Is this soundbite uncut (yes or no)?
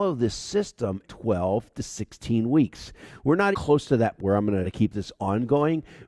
no